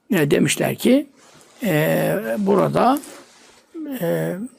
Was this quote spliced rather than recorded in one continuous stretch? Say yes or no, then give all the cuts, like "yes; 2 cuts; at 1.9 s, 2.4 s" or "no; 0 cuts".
no; 0 cuts